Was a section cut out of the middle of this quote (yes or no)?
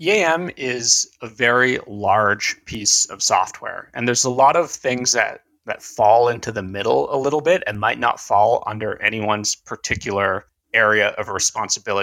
yes